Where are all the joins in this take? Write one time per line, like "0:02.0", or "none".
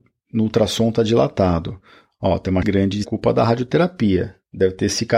0:02.6
0:03.0